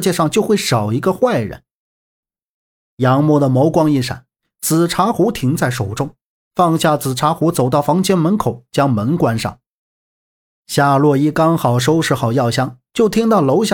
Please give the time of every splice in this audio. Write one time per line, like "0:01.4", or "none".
none